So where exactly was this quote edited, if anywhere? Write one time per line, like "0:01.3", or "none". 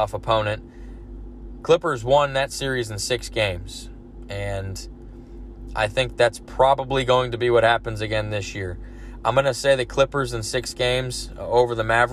none